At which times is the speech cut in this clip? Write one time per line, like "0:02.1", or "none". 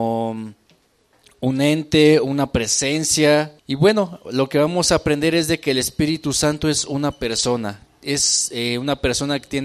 0:03.6
0:07.9